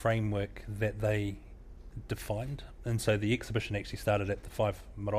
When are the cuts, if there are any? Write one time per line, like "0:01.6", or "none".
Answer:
none